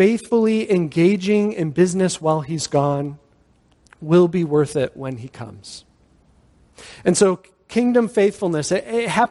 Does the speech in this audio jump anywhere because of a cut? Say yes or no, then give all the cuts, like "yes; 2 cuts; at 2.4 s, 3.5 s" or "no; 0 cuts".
no; 0 cuts